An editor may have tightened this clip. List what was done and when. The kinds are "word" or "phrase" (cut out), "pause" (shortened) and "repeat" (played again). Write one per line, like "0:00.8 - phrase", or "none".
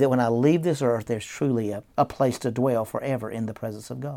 none